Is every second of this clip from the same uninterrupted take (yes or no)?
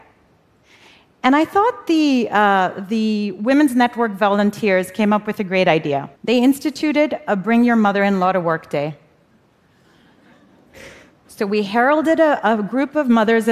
no